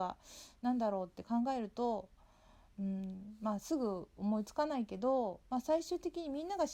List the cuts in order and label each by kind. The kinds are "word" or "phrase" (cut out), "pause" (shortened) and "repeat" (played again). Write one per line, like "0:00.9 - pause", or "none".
none